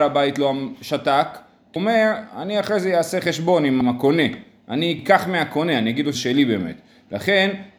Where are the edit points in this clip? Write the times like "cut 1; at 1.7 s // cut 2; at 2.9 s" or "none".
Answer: cut 1; at 1.8 s // cut 2; at 3.8 s // cut 3; at 5.0 s // cut 4; at 6.1 s